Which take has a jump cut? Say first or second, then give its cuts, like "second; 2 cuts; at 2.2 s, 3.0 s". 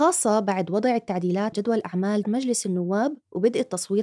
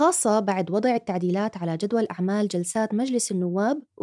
first; 2 cuts; at 1.5 s, 2.2 s